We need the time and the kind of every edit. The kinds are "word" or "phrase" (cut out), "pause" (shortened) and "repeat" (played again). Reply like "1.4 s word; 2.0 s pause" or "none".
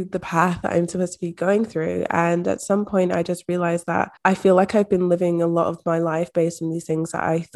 4.2 s pause